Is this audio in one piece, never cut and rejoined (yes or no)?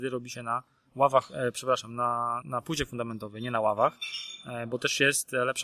no